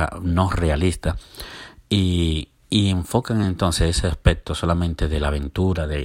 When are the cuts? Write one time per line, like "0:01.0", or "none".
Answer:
none